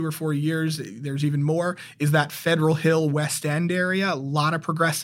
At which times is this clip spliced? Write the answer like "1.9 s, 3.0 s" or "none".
none